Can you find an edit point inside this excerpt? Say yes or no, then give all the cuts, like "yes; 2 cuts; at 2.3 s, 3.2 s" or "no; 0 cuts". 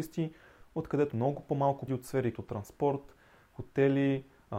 yes; 3 cuts; at 1.1 s, 1.9 s, 2.3 s